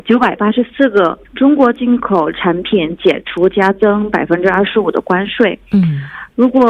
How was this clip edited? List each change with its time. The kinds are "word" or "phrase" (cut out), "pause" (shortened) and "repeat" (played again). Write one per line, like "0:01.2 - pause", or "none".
0:01.2 - pause